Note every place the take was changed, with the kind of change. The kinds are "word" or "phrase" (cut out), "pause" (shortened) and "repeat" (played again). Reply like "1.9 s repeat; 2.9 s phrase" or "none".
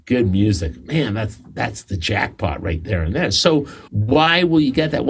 3.9 s pause